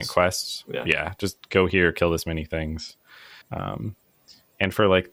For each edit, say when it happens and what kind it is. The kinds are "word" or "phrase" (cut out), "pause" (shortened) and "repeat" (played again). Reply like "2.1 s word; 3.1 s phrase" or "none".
3.4 s pause